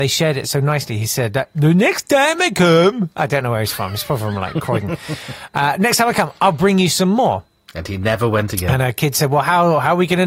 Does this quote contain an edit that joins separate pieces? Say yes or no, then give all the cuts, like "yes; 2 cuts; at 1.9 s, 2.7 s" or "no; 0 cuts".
no; 0 cuts